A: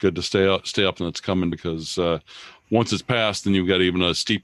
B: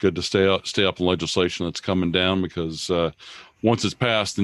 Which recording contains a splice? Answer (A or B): A